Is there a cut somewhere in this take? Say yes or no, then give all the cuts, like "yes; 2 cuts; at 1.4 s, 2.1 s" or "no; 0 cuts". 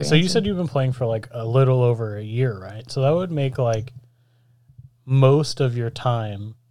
no; 0 cuts